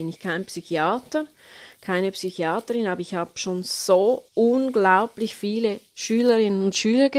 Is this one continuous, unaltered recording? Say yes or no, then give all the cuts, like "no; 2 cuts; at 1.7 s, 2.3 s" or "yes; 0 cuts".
no; 1 cut; at 4.3 s